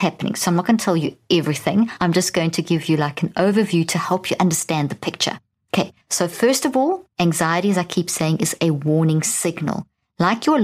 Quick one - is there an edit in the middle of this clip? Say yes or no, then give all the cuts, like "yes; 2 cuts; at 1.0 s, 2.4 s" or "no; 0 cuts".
yes; 2 cuts; at 6.0 s, 7.1 s